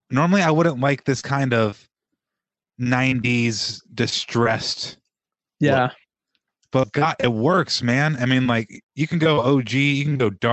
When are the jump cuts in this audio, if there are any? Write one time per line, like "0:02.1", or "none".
none